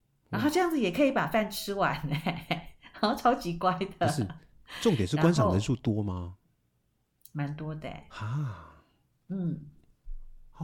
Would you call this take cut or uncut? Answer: uncut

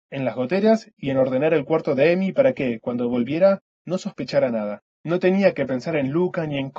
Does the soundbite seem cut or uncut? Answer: cut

